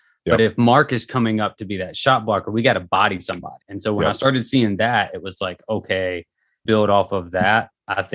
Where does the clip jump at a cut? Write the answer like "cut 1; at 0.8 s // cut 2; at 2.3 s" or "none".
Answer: cut 1; at 3.6 s // cut 2; at 6.7 s